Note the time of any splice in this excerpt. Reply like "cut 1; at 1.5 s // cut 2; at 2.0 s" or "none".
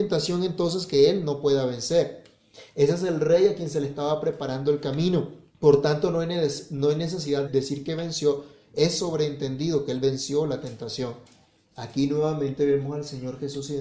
cut 1; at 5.5 s // cut 2; at 7.5 s